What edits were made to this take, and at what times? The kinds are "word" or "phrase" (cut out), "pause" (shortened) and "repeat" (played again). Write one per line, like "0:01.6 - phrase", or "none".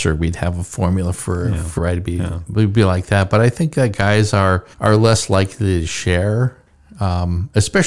0:01.8 - phrase
0:04.7 - pause

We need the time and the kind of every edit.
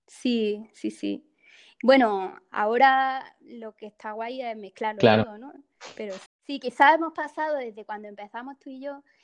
0:06.3 - word

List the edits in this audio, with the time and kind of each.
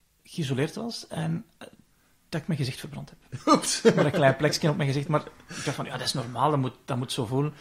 none

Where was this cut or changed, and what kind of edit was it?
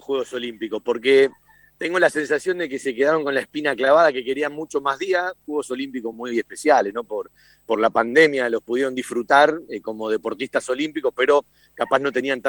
none

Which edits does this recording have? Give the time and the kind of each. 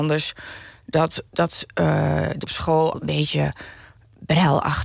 0:01.3 - pause
0:02.4 - word
0:02.9 - word

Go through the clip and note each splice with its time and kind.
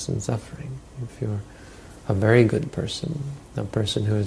none

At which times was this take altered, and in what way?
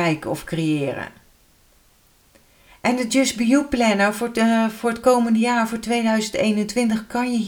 none

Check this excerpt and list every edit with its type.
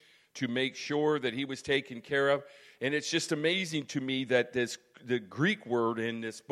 none

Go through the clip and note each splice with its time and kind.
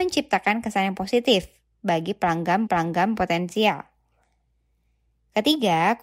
0:02.7 - repeat

